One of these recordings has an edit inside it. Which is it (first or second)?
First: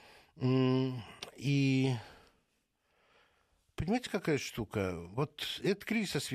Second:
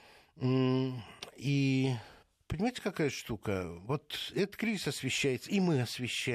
second